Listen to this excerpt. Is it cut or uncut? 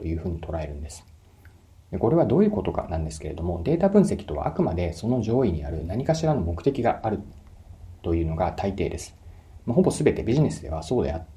cut